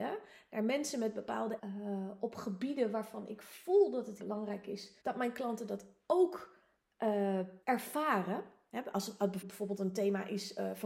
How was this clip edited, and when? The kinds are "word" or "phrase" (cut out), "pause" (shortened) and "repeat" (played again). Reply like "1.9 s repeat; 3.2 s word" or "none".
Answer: 1.6 s word; 4.2 s word; 5.0 s pause; 7.6 s pause; 9.4 s word